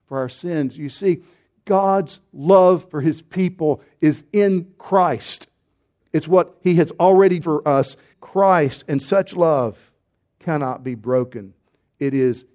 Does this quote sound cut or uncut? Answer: cut